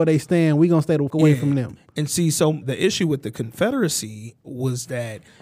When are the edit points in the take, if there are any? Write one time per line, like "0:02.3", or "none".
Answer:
0:01.1
0:02.6